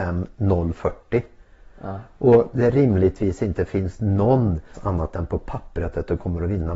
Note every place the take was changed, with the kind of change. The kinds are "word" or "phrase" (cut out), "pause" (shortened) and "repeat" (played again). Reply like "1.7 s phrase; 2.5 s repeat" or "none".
4.7 s word